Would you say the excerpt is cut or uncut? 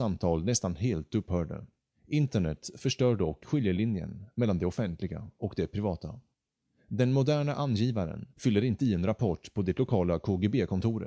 cut